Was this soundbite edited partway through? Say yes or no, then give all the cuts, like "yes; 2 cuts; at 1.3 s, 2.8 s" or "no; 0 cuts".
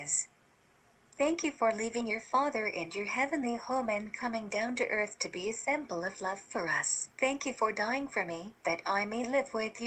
yes; 2 cuts; at 7.1 s, 8.6 s